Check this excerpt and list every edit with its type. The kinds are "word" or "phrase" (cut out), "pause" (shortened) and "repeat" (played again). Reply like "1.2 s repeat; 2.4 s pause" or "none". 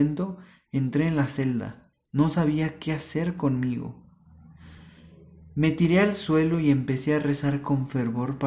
none